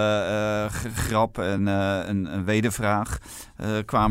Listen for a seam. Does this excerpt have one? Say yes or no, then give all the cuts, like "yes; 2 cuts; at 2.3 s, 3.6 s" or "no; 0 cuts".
no; 0 cuts